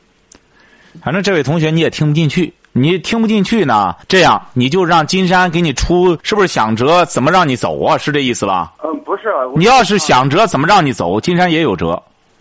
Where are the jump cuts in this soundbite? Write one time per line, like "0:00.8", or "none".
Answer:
0:04.0
0:06.2
0:08.8